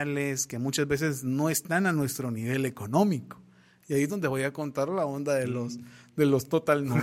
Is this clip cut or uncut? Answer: uncut